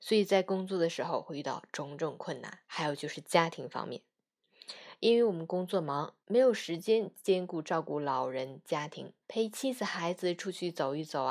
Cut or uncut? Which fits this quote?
cut